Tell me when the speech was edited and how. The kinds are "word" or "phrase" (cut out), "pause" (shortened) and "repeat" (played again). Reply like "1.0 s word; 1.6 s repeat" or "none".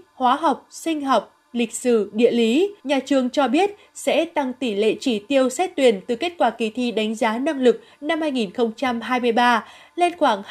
2.8 s pause